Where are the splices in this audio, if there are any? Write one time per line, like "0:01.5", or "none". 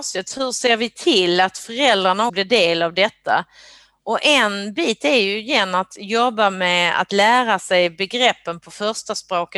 0:02.3